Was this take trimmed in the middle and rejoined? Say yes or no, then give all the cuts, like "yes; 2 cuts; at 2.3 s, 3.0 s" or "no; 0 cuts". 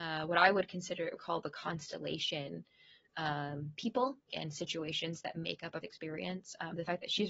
yes; 4 cuts; at 1.2 s, 3.1 s, 4.3 s, 5.8 s